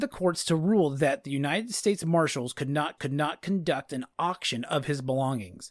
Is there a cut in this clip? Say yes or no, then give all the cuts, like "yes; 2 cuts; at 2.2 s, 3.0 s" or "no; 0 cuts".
yes; 1 cut; at 3.0 s